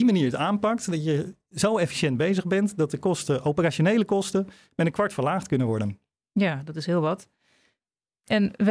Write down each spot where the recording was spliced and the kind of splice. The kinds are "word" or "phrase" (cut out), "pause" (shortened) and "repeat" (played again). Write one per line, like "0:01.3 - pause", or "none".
none